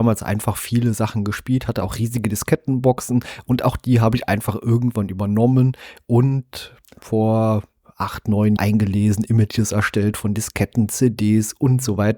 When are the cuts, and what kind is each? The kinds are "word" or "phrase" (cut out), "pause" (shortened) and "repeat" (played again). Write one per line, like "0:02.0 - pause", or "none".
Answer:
0:08.6 - phrase